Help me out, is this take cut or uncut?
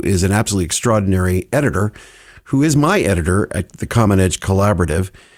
uncut